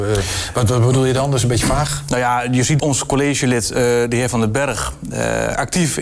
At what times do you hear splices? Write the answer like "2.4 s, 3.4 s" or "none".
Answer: 2.8 s